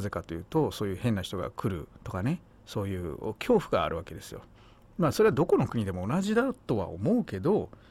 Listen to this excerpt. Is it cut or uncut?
cut